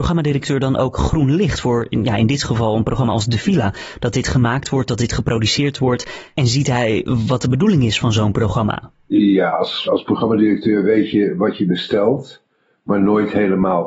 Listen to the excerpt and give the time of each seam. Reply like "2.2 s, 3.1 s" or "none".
9.9 s